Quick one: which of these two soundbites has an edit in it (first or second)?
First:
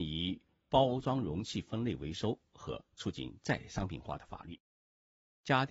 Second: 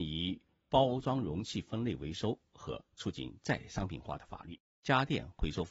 second